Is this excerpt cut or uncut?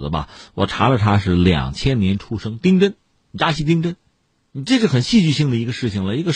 uncut